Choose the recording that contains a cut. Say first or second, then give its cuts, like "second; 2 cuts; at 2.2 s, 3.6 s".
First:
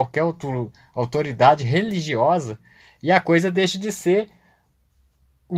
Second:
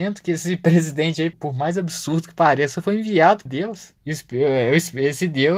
second; 3 cuts; at 1.3 s, 3.5 s, 4.0 s